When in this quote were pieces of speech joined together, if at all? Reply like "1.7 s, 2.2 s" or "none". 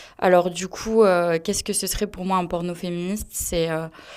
none

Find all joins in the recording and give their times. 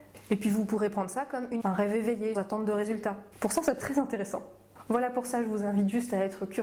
1.6 s, 2.3 s, 3.3 s, 3.8 s

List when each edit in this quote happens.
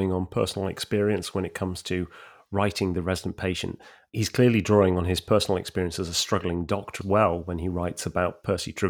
7.0 s

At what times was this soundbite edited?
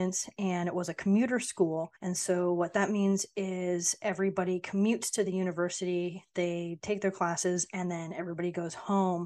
2.0 s

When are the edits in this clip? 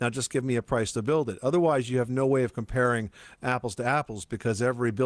none

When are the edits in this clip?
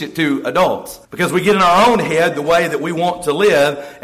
1.0 s

